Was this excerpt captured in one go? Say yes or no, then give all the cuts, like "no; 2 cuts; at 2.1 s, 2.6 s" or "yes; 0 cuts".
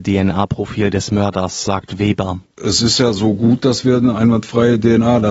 yes; 0 cuts